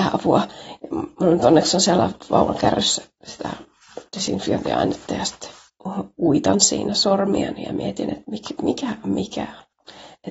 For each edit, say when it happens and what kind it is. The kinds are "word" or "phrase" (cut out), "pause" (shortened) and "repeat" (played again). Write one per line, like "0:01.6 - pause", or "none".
0:04.1 - pause